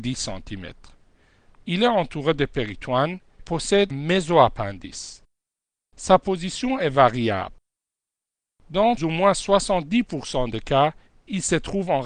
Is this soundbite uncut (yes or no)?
no